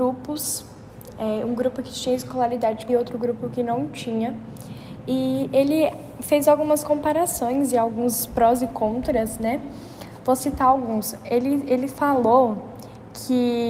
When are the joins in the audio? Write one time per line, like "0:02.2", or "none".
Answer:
0:02.9
0:08.3